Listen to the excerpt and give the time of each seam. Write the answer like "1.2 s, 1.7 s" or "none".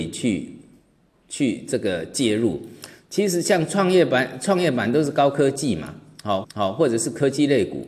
6.4 s